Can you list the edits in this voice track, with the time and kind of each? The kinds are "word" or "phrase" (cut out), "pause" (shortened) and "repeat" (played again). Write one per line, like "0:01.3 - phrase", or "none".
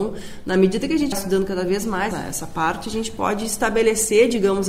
0:01.1 - word
0:02.1 - word